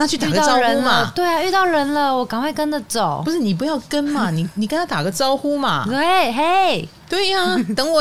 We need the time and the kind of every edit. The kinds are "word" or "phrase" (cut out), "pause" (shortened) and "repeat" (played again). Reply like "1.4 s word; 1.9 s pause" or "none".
none